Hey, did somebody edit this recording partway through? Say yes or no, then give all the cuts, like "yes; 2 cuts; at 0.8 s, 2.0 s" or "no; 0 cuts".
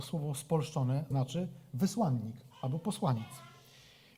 yes; 2 cuts; at 1.1 s, 2.5 s